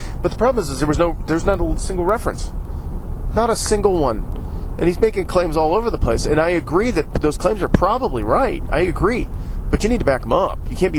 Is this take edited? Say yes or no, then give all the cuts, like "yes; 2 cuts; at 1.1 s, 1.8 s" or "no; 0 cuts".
no; 0 cuts